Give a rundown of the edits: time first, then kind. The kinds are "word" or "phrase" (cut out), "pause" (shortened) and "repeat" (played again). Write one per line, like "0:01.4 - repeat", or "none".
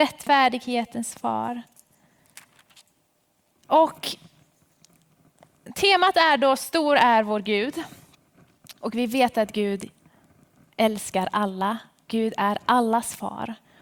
none